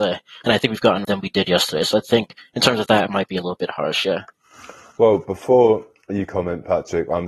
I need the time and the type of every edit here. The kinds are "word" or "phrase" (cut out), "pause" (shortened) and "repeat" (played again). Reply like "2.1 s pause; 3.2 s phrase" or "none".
1.0 s phrase